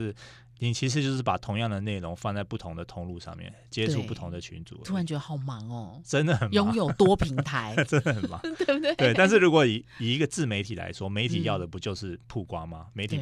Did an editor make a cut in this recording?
yes; 1 cut; at 12.2 s

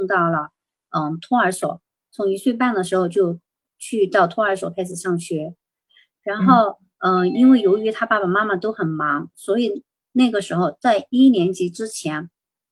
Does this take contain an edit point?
no; 0 cuts

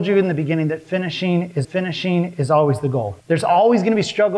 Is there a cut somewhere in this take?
yes; 2 cuts; at 1.6 s, 3.2 s

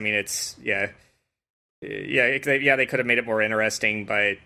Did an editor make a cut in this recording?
no; 0 cuts

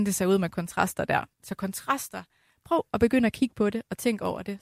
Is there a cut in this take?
yes; 1 cut; at 1.3 s

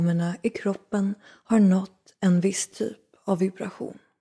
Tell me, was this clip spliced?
no; 0 cuts

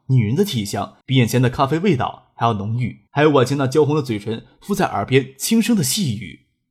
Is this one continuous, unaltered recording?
no; 2 cuts; at 1.0 s, 3.1 s

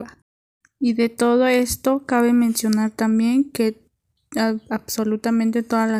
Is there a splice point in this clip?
no; 0 cuts

